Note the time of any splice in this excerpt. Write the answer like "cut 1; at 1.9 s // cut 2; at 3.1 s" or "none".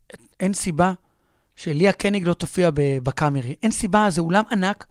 none